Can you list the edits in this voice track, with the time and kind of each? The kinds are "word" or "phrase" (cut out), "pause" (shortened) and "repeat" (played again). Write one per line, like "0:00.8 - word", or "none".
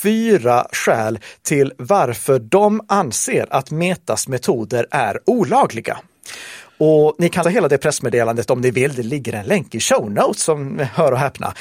0:07.4 - word